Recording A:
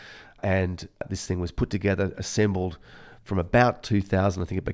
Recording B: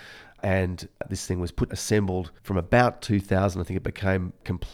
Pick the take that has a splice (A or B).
B